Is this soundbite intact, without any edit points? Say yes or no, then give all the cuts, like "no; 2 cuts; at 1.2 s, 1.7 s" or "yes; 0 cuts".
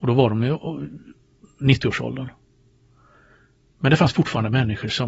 yes; 0 cuts